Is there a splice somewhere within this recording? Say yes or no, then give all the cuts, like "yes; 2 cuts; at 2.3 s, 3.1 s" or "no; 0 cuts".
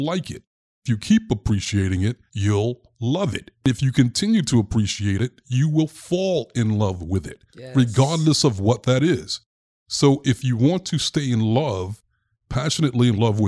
yes; 2 cuts; at 2.3 s, 7.5 s